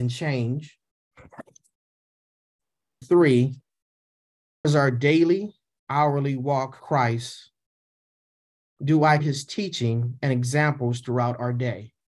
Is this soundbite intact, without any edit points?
no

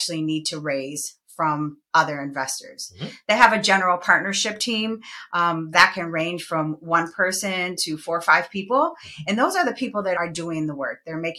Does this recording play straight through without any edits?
no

